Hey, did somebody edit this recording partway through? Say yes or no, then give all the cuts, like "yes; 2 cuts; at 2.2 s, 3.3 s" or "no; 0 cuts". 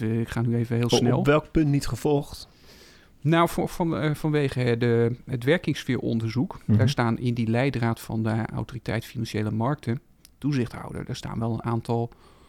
no; 0 cuts